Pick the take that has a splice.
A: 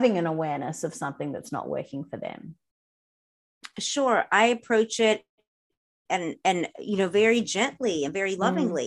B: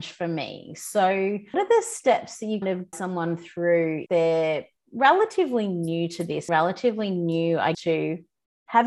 B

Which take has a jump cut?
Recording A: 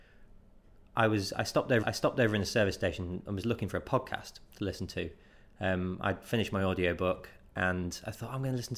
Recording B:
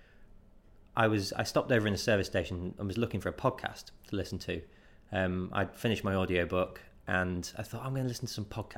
A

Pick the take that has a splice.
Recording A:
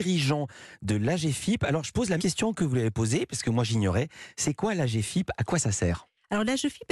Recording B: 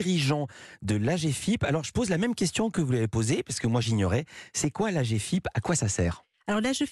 A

